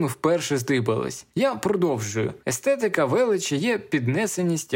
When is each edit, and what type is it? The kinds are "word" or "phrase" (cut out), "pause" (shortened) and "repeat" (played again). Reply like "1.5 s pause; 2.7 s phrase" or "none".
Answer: 1.3 s pause; 2.4 s pause